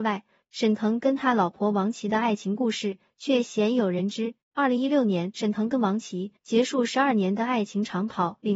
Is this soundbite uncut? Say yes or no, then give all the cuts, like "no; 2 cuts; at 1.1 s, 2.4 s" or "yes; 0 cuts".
no; 2 cuts; at 4.4 s, 6.4 s